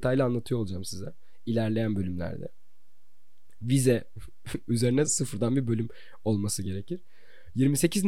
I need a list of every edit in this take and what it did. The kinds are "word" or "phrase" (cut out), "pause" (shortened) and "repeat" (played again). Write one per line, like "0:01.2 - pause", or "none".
0:05.1 - word

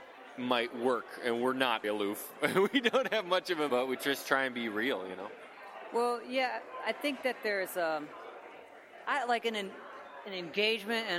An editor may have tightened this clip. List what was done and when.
0:01.8 - word
0:03.7 - word

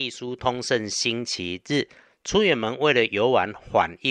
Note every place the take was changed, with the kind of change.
none

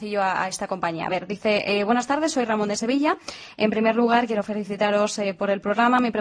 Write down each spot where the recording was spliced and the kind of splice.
none

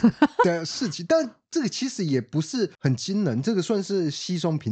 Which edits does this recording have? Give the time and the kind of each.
0:02.7 - pause

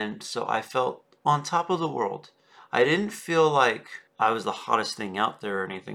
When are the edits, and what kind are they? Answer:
0:04.1 - pause

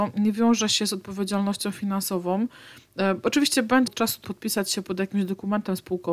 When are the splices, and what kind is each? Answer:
0:03.9 - word
0:04.2 - word

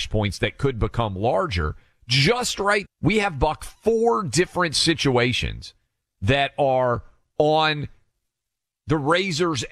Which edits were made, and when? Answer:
0:02.8 - word

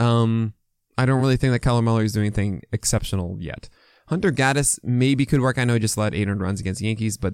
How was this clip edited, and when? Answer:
none

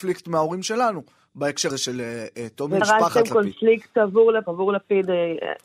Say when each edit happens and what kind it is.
0:01.7 - word
0:02.8 - word
0:04.5 - word

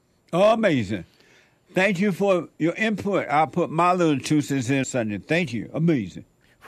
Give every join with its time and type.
0:04.8 - word

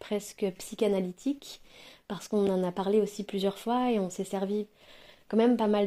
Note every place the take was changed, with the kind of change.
none

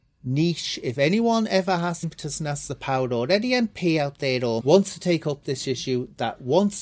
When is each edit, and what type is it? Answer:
0:02.0 - word
0:04.6 - word

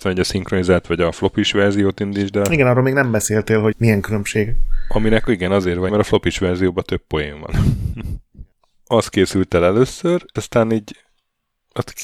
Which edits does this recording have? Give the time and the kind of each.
0:03.7 - word
0:05.9 - word
0:10.4 - word

